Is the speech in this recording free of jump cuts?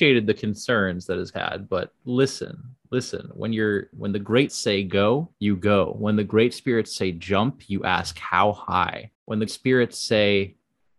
no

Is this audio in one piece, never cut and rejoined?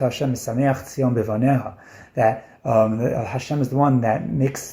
yes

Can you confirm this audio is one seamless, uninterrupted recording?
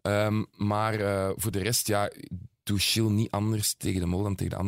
yes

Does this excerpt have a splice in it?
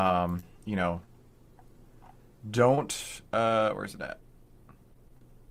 no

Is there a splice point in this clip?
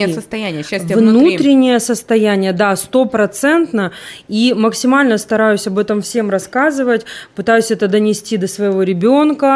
no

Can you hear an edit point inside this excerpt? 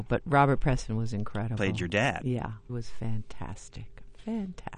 yes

